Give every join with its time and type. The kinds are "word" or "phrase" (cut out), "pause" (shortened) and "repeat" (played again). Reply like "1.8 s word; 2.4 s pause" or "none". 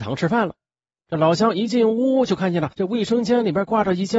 2.7 s pause